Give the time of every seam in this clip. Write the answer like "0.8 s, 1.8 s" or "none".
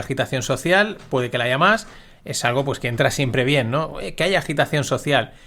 none